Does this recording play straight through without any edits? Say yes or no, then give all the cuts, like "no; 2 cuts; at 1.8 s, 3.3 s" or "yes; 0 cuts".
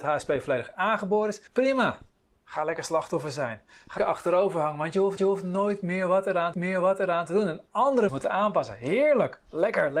no; 5 cuts; at 1.5 s, 4.0 s, 5.2 s, 6.5 s, 8.1 s